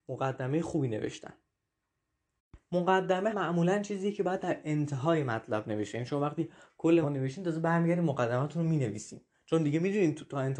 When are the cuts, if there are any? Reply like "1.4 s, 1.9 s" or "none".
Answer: 3.3 s, 5.9 s, 7.0 s